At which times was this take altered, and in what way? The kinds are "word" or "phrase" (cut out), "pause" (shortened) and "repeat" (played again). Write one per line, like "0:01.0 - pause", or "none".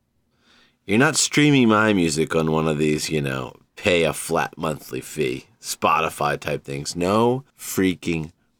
0:07.5 - pause